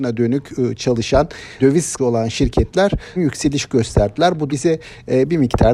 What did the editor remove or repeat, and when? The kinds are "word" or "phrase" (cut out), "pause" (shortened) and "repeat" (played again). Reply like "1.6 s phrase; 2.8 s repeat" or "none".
1.6 s word; 2.0 s word; 3.2 s word; 4.5 s word